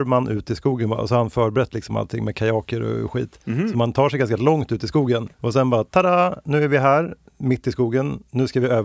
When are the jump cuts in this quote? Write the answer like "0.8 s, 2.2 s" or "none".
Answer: 5.3 s